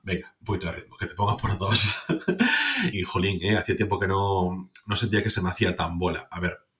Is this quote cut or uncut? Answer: cut